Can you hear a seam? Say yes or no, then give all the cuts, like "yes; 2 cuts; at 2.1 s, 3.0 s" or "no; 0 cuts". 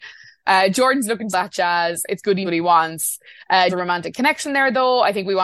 yes; 3 cuts; at 1.3 s, 2.4 s, 3.7 s